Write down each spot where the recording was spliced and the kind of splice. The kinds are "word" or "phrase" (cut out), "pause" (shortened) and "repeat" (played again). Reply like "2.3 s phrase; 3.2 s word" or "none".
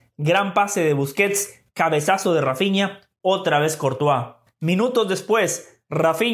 4.5 s pause